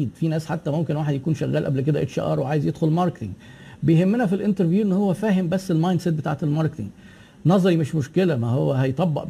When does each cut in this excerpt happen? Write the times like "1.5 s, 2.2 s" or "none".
none